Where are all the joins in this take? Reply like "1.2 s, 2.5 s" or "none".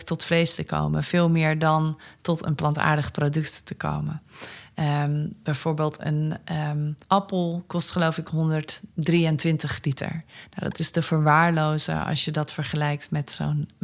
7.0 s, 8.9 s